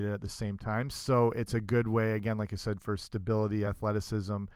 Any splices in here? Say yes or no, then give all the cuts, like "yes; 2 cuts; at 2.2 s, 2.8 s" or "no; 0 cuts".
no; 0 cuts